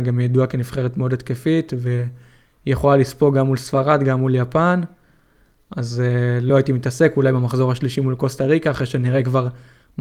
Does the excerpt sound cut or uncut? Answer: uncut